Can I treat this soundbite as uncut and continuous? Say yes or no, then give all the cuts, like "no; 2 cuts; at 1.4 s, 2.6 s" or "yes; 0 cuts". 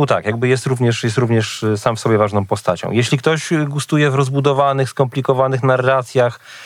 yes; 0 cuts